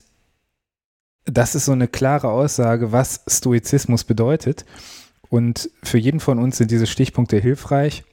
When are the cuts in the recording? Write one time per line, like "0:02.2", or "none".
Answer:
none